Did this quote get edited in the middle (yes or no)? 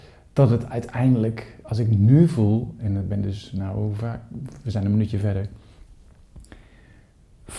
no